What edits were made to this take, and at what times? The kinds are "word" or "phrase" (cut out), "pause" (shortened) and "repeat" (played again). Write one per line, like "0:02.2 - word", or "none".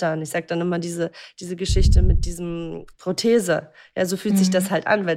0:02.9 - word

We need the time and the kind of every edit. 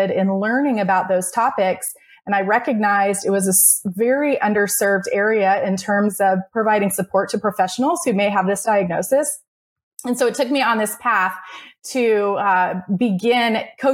none

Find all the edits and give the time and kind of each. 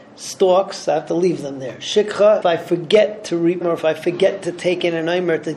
0:02.4 - word
0:03.6 - word

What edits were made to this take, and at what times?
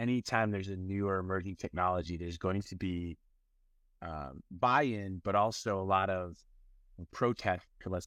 none

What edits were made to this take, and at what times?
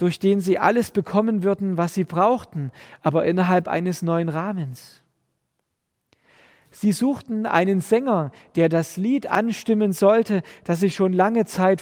none

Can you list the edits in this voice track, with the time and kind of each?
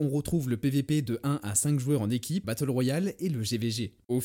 0:02.4 - word

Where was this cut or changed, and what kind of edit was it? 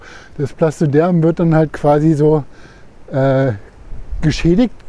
none

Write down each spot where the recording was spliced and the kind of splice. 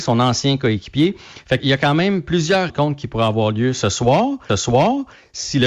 0:01.6 - word
0:02.7 - word
0:04.5 - repeat

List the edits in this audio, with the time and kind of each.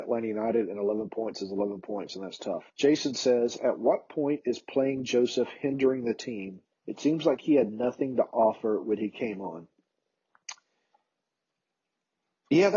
0:02.7 - pause
0:06.7 - pause

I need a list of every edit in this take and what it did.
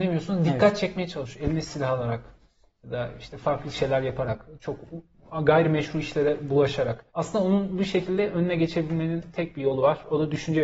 0:07.1 - pause

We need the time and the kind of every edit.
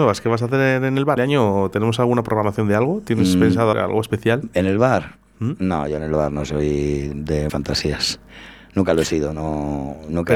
0:01.2 - phrase
0:03.7 - word
0:07.5 - word

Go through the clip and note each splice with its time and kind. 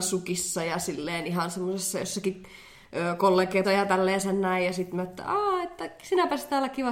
0:03.6 - word

